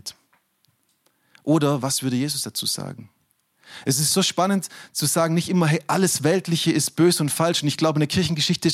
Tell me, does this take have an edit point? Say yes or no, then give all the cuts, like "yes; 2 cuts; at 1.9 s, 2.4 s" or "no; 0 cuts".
no; 0 cuts